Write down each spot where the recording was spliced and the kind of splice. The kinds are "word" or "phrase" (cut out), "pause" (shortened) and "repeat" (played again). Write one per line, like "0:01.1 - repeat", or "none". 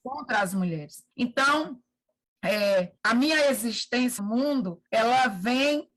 0:01.1 - pause
0:03.0 - pause
0:04.2 - word
0:04.9 - pause